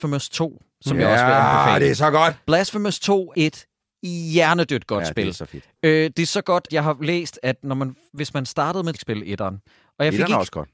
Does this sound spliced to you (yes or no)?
yes